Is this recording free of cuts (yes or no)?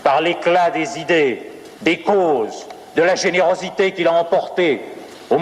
no